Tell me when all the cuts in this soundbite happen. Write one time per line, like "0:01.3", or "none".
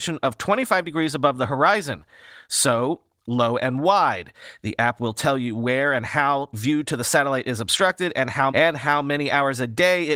0:06.5
0:08.5